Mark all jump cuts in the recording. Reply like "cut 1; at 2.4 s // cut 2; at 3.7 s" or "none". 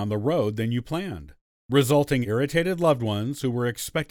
cut 1; at 2.2 s